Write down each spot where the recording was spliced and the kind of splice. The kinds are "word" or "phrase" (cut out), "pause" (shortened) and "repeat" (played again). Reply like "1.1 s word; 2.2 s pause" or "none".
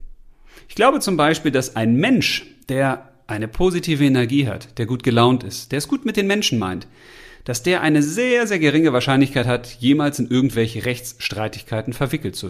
none